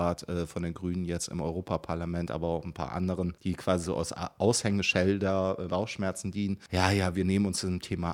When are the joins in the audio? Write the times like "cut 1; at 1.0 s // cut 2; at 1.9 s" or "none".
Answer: cut 1; at 5.7 s